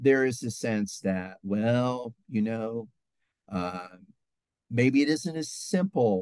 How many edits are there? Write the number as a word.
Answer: zero